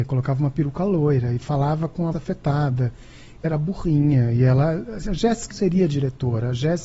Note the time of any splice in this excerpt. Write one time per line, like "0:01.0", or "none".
0:02.1
0:03.4
0:05.5